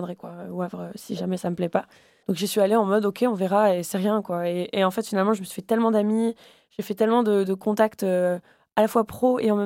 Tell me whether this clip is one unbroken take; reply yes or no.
yes